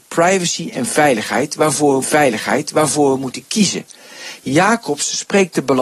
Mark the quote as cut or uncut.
cut